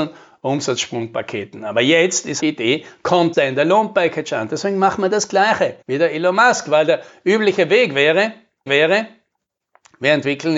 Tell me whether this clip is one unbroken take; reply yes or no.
no